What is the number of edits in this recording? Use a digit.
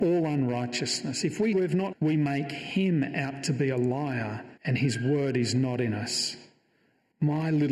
3